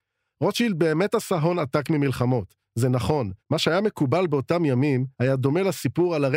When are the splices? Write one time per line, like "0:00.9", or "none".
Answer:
0:03.4
0:05.1